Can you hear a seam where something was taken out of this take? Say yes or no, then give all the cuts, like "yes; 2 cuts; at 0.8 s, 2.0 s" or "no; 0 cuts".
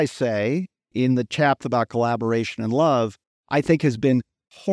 yes; 2 cuts; at 1.6 s, 3.2 s